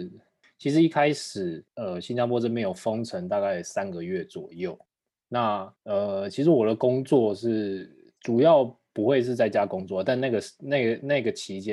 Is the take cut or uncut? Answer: cut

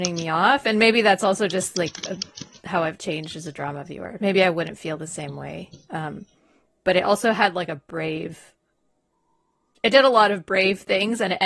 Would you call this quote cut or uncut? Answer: uncut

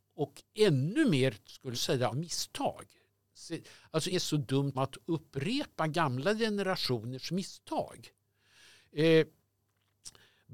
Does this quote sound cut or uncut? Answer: cut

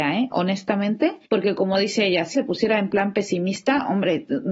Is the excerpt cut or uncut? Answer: cut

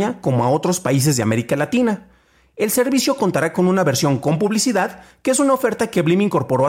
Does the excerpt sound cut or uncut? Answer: uncut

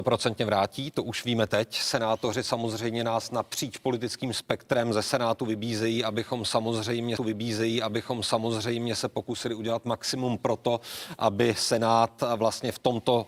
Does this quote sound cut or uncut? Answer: cut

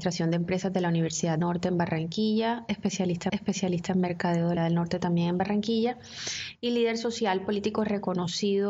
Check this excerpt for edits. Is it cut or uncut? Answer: cut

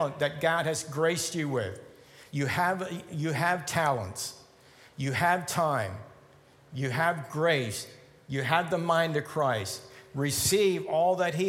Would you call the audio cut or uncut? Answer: uncut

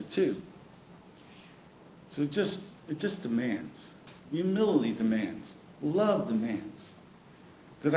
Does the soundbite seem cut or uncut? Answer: cut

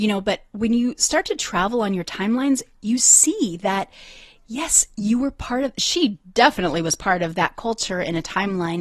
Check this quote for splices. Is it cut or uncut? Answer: uncut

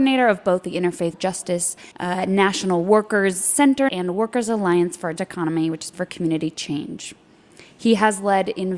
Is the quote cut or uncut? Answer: cut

